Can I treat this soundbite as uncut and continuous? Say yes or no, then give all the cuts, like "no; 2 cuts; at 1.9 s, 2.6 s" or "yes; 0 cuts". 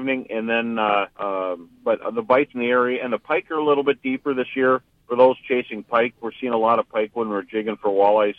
no; 3 cuts; at 1.1 s, 2.5 s, 5.0 s